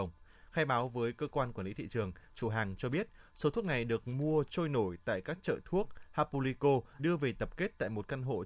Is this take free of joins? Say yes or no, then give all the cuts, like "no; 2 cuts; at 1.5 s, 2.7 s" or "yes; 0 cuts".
no; 1 cut; at 7.0 s